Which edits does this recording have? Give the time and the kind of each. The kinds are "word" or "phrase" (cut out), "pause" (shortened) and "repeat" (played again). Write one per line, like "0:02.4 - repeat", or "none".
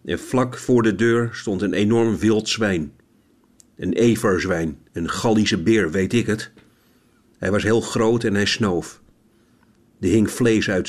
none